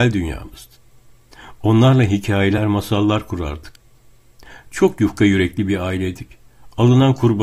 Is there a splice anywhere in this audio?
no; 0 cuts

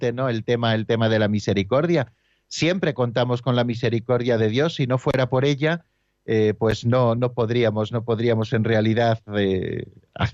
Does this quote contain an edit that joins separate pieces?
no; 0 cuts

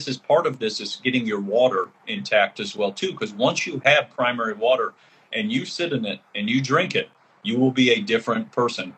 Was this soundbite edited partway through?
no; 0 cuts

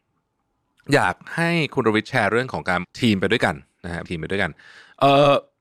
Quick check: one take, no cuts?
no; 2 cuts; at 2.8 s, 4.0 s

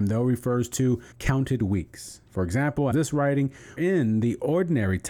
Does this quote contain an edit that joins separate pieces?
yes; 4 cuts; at 1.1 s, 2.3 s, 2.9 s, 3.8 s

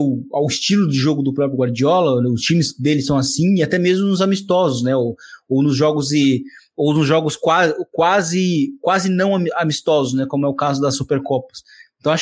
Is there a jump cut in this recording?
no; 0 cuts

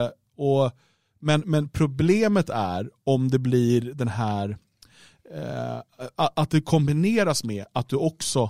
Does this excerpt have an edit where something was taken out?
no; 0 cuts

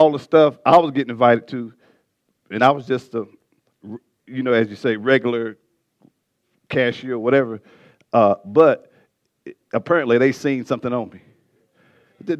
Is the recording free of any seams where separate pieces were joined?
yes; 0 cuts

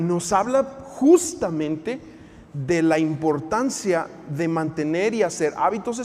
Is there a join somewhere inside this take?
no; 0 cuts

